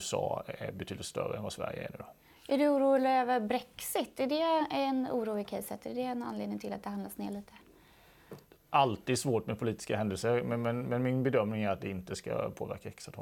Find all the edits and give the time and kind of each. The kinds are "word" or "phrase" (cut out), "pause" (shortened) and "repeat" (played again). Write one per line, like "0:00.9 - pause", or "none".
none